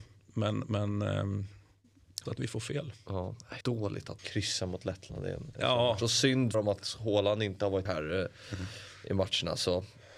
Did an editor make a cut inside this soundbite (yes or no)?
yes